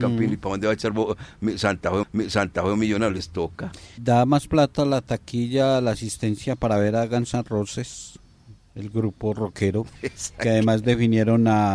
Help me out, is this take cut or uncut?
cut